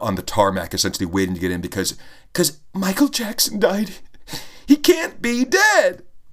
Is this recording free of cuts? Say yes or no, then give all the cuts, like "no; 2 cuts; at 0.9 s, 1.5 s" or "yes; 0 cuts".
yes; 0 cuts